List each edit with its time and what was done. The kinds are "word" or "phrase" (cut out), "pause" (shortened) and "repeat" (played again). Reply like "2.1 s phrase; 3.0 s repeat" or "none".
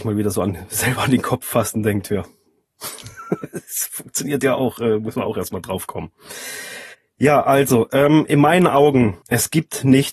6.9 s pause; 9.2 s pause